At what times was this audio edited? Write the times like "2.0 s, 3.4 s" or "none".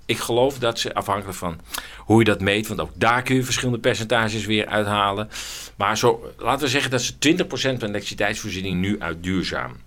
none

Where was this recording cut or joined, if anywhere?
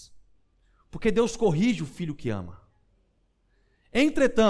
none

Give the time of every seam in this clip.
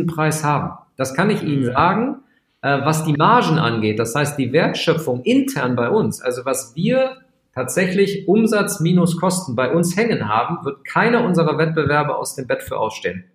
none

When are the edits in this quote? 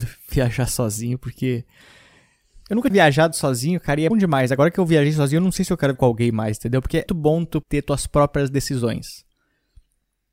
2.9 s, 4.1 s, 5.9 s, 7.1 s, 7.6 s

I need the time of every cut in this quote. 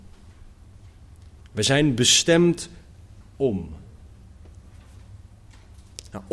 none

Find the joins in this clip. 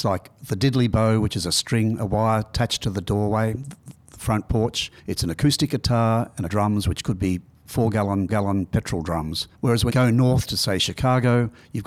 5.0 s, 6.5 s, 8.3 s, 9.5 s, 9.9 s

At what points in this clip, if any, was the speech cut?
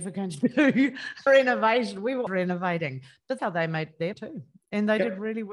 1.3 s, 2.3 s, 3.4 s, 4.1 s

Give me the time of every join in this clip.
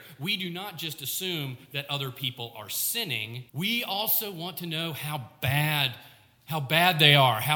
3.5 s

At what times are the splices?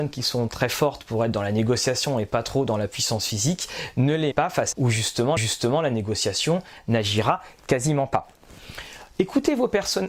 4.3 s, 4.7 s, 5.4 s

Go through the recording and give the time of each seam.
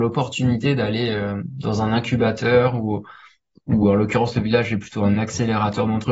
none

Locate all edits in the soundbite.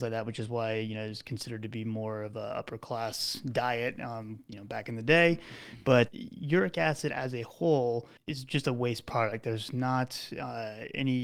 6.1 s, 8.2 s

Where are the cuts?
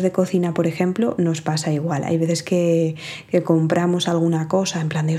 none

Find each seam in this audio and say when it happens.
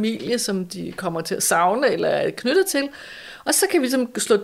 none

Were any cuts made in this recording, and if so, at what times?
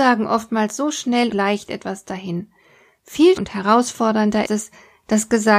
1.3 s, 3.4 s, 4.5 s

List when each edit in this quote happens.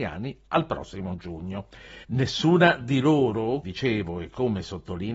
2.0 s, 3.6 s

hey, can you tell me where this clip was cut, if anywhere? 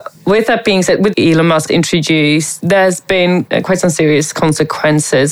1.1 s, 1.7 s, 2.6 s, 3.5 s

